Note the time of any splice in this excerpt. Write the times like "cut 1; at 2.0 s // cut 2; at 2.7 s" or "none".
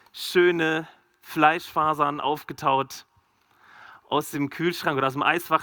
none